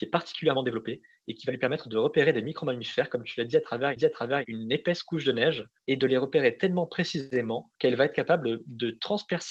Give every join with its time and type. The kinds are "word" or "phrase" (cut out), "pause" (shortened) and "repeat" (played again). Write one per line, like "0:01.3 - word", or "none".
0:04.0 - repeat
0:05.8 - pause
0:07.7 - pause